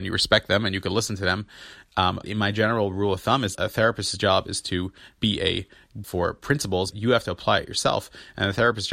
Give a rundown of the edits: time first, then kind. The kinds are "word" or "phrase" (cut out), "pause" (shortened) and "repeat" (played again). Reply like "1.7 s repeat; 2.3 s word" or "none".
2.2 s word; 3.5 s word; 5.2 s word; 6.0 s word; 6.9 s word